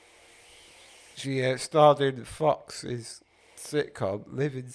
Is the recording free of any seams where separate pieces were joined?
yes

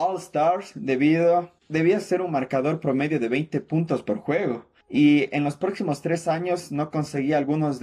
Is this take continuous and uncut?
no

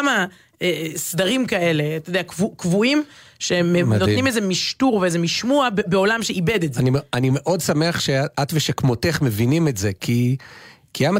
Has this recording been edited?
no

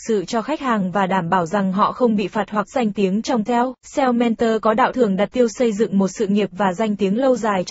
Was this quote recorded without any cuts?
no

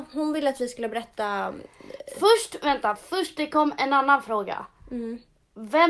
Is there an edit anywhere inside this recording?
no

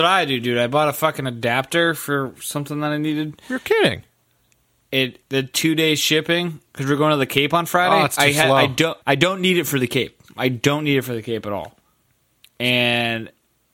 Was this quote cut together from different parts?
yes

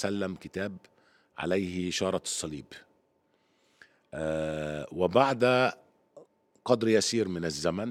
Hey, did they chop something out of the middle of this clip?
no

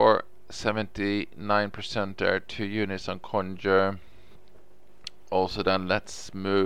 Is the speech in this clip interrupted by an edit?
no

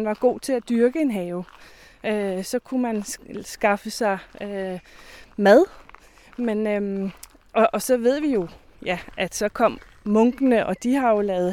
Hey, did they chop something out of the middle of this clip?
no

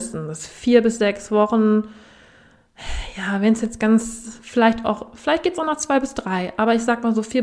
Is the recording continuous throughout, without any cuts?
yes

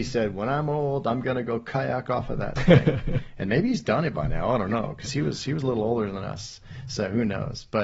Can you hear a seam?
no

